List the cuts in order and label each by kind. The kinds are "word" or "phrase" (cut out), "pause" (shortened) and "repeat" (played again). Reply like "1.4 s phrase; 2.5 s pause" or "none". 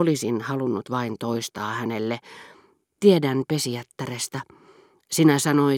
none

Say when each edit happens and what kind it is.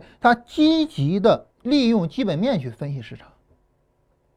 1.5 s pause

